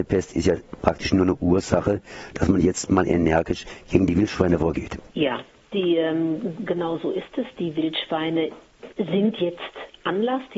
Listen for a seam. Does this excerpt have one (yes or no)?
yes